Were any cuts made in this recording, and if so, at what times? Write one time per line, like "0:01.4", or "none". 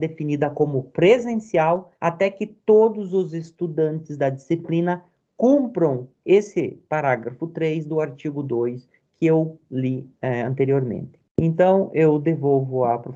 0:02.0